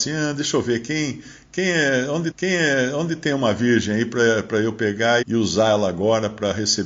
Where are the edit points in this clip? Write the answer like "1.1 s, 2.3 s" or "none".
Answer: 2.3 s, 5.2 s